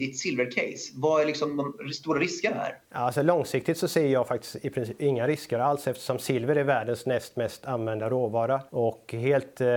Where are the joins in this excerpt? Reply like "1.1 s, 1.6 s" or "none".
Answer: 2.8 s, 8.7 s